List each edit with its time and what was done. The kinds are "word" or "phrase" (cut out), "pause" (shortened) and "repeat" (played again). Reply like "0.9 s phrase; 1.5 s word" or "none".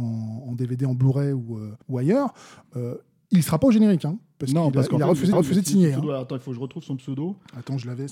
1.8 s pause; 5.3 s repeat